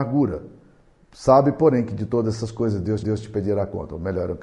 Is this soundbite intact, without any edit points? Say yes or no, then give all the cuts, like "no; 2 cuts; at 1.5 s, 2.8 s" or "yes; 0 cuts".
no; 1 cut; at 3.0 s